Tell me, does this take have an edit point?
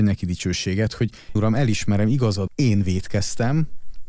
yes; 2 cuts; at 1.4 s, 2.5 s

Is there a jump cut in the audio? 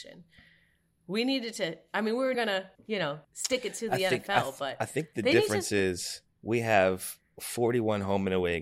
yes; 4 cuts; at 2.3 s, 2.7 s, 3.2 s, 6.3 s

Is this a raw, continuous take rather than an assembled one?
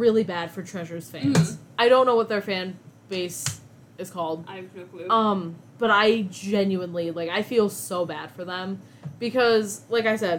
yes; 0 cuts

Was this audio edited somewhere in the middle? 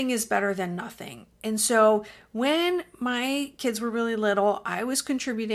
no; 0 cuts

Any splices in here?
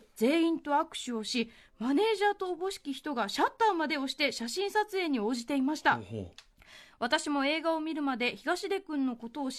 no; 0 cuts

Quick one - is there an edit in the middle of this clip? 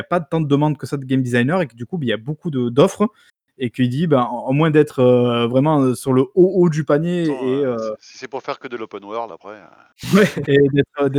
no; 0 cuts

